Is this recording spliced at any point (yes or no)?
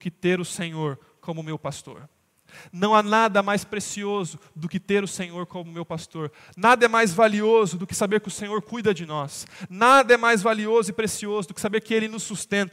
no